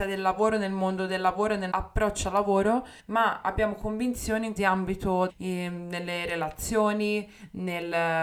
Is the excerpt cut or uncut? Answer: cut